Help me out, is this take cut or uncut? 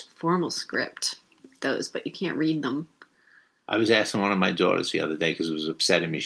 cut